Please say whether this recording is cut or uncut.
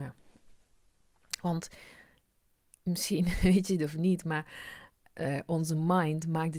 uncut